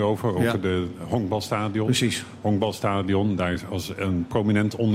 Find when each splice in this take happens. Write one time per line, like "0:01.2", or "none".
none

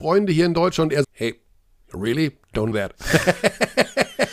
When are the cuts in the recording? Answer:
0:01.0
0:02.7

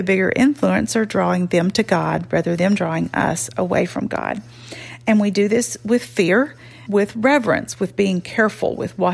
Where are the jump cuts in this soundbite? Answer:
0:02.6
0:06.9

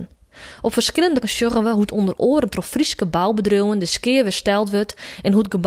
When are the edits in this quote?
0:01.2

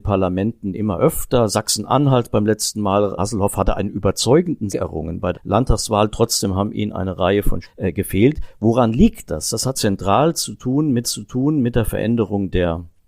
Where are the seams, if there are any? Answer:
0:03.2
0:04.7
0:05.3
0:07.6
0:09.7
0:11.0

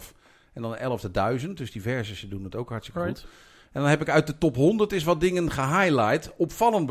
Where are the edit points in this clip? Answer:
none

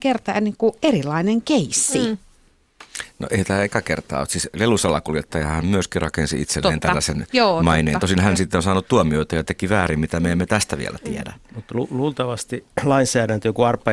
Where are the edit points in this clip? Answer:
none

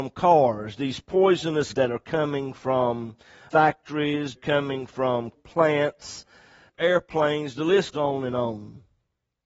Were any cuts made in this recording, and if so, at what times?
0:01.7
0:04.3
0:05.3
0:07.9

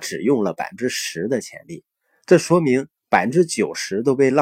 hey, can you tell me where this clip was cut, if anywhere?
0:03.0

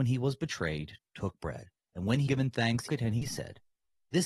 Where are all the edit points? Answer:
0:01.8
0:02.3
0:02.9

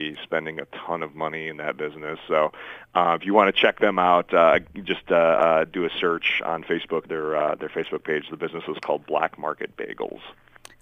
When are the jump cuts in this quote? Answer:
0:07.0

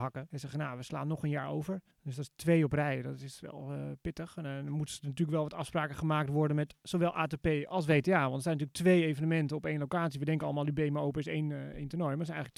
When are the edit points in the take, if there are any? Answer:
0:01.9

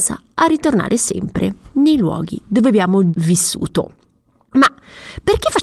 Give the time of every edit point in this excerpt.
0:03.1

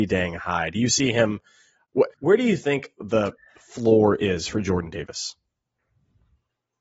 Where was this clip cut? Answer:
0:02.1

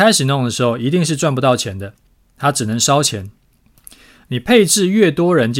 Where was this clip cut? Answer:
none

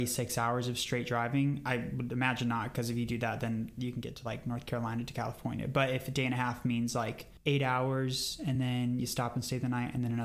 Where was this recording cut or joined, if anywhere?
none

